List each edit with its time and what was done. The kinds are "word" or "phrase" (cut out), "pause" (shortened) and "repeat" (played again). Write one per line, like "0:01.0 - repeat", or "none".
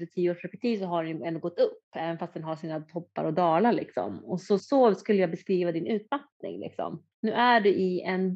0:04.6 - word
0:07.1 - pause